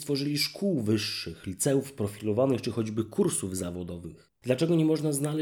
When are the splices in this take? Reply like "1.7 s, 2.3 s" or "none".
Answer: none